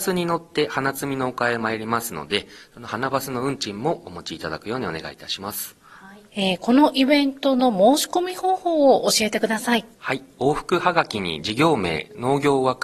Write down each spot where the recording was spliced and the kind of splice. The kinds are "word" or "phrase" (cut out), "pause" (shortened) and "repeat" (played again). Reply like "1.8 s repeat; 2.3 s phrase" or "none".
6.3 s pause; 9.9 s pause

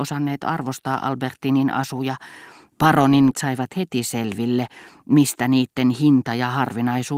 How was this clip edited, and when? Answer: 3.3 s word

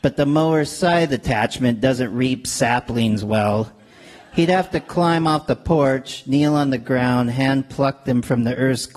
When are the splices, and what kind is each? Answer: none

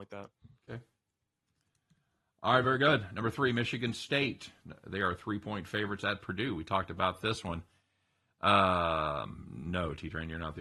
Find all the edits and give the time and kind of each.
none

